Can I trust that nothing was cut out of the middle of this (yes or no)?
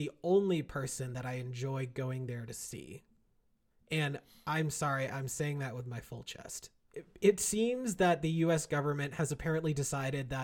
yes